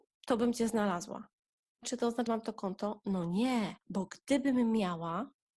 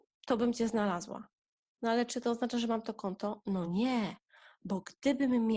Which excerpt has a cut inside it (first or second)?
first